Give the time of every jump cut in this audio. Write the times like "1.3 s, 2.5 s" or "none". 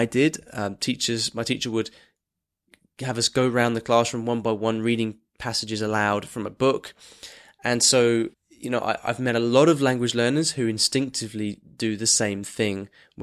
8.3 s